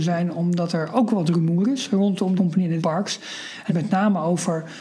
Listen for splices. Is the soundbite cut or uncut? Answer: cut